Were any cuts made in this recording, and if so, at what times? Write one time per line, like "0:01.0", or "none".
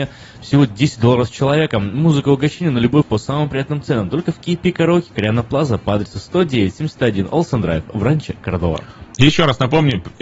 0:03.0